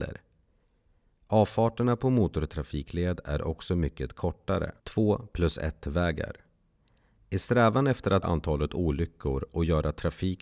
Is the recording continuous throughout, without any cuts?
no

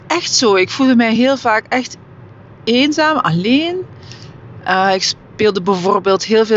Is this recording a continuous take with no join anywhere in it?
yes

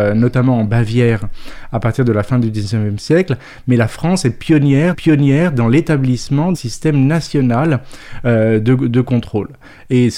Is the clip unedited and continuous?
no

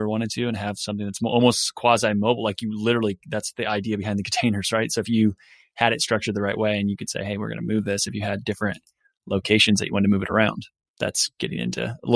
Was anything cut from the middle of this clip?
no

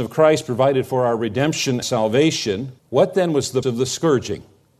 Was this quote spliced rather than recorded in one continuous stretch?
yes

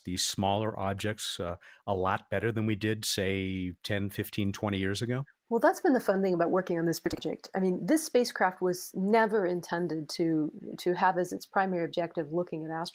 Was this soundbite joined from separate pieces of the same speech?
no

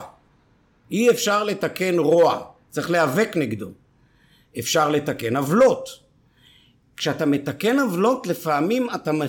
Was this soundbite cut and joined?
no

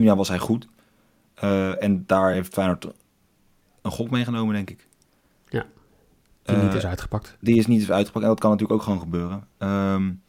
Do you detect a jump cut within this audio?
no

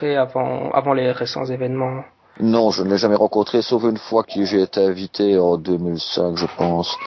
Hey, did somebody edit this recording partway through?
no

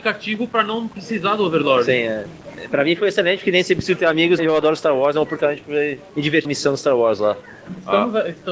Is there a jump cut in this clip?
yes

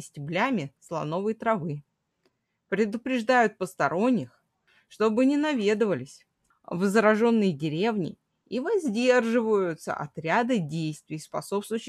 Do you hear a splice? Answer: no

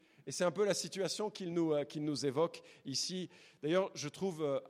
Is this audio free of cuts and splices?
yes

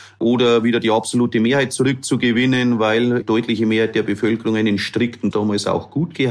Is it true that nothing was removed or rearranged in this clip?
no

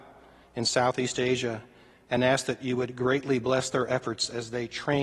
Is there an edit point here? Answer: no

